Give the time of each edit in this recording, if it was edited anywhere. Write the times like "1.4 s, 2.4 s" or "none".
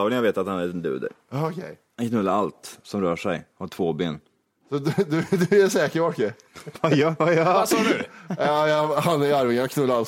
none